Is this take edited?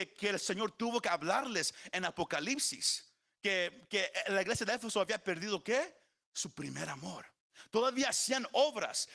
no; 0 cuts

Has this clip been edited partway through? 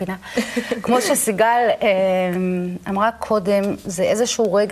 no; 0 cuts

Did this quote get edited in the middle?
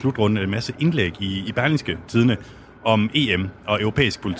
no; 0 cuts

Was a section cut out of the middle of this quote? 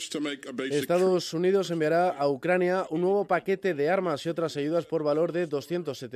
no; 0 cuts

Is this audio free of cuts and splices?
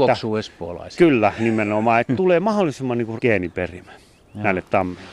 no; 1 cut; at 3.2 s

